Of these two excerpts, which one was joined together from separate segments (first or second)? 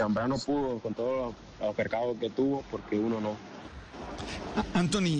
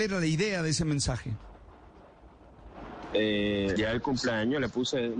second